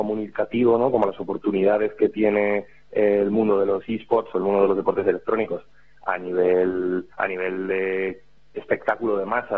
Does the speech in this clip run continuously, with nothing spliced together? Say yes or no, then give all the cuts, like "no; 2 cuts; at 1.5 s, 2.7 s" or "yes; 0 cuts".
no; 1 cut; at 7.1 s